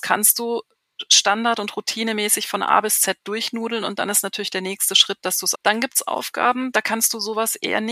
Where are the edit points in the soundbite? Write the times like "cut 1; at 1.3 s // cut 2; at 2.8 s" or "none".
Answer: cut 1; at 5.5 s